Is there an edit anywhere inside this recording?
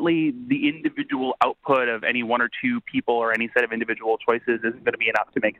no; 0 cuts

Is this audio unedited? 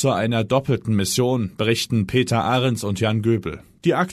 yes; 0 cuts

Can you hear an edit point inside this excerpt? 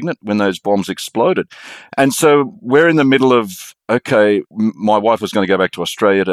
yes; 1 cut; at 4.5 s

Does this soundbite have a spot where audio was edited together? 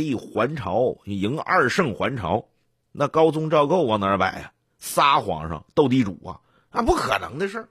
no; 0 cuts

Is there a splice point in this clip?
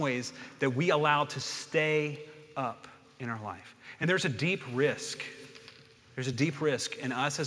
no; 0 cuts

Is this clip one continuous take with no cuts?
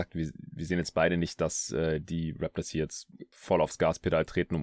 yes; 0 cuts

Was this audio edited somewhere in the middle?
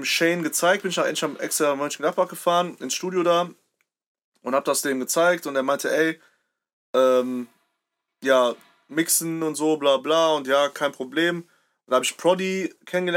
no; 0 cuts

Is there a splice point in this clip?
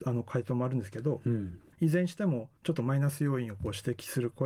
yes; 1 cut; at 2.6 s

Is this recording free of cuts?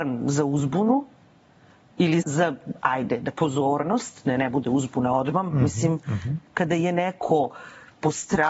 no; 2 cuts; at 2.2 s, 3.3 s

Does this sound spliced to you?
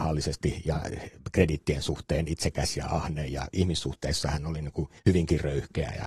yes; 1 cut; at 5.0 s

